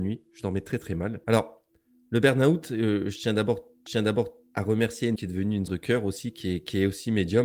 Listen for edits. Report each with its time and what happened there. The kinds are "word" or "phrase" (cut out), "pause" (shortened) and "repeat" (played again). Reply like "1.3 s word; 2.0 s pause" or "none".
1.2 s pause; 3.9 s repeat; 5.2 s word; 5.7 s word

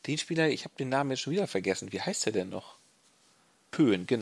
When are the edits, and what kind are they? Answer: none

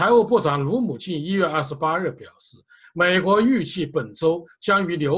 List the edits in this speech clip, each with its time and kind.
none

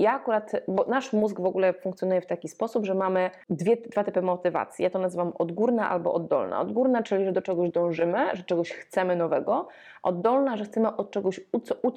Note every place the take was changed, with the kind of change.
3.4 s pause

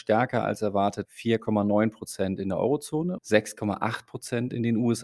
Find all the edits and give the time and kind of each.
1.0 s word; 3.2 s word

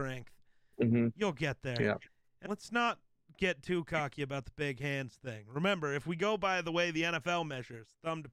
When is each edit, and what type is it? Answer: 2.4 s word

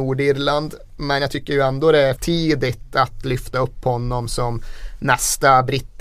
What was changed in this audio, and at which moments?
2.2 s word

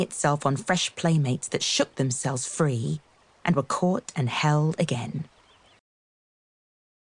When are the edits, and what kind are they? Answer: none

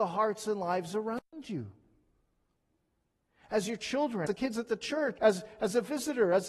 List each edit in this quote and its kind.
4.3 s word; 5.2 s word

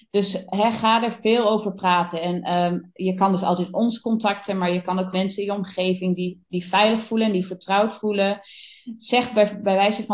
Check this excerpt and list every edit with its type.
5.1 s word

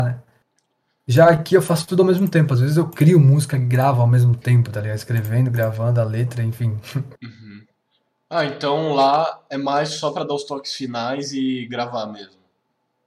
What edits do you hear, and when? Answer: 7.1 s pause

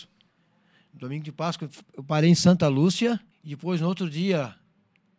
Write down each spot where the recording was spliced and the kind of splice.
3.3 s pause

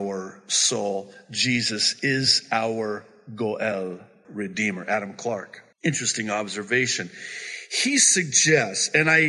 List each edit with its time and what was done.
4.2 s word; 5.7 s pause

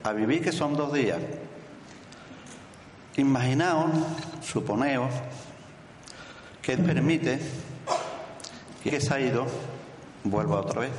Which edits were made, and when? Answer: 6.8 s word; 8.9 s word

